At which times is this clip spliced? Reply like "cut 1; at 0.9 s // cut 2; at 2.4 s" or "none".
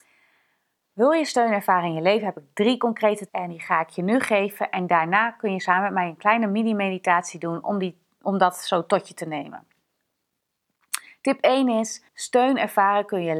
cut 1; at 3.3 s // cut 2; at 12.1 s